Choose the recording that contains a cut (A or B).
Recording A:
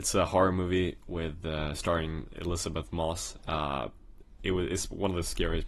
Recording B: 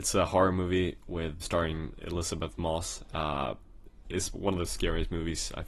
B